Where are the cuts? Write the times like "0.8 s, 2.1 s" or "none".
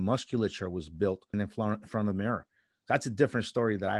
1.3 s

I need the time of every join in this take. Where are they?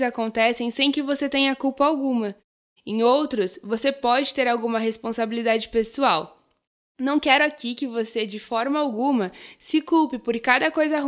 none

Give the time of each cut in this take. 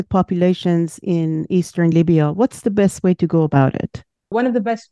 none

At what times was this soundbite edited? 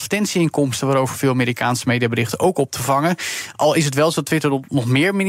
none

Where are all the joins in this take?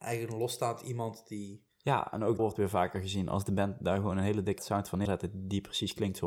2.4 s, 4.6 s, 5.0 s

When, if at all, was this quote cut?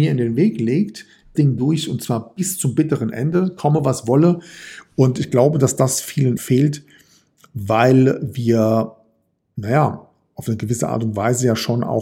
1.3 s, 6.4 s

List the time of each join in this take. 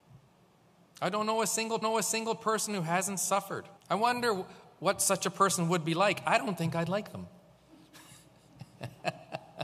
1.8 s, 3.8 s

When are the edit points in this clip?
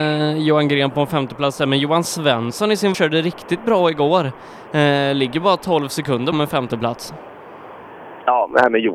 2.9 s, 6.3 s

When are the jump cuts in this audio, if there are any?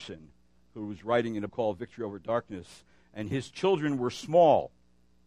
1.5 s, 3.3 s

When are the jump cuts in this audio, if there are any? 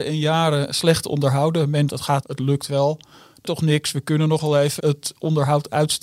1.9 s, 2.2 s, 3.4 s, 4.8 s

